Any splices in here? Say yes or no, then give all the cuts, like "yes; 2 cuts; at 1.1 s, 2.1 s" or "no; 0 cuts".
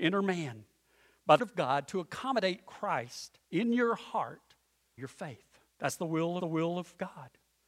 yes; 5 cuts; at 1.4 s, 3.4 s, 5.0 s, 5.7 s, 6.4 s